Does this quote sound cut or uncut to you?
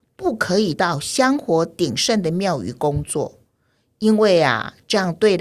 uncut